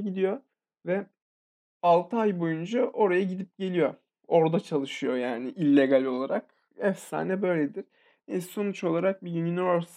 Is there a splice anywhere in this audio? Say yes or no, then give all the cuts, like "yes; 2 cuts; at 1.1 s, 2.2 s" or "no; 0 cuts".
yes; 1 cut; at 1.2 s